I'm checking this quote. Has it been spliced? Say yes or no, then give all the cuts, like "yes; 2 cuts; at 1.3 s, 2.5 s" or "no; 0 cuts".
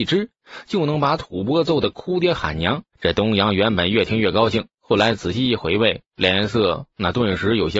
yes; 1 cut; at 2.9 s